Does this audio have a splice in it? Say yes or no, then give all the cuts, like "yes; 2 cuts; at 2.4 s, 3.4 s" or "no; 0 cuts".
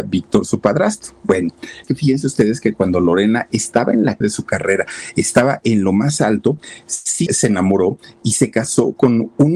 yes; 3 cuts; at 1.8 s, 4.2 s, 7.3 s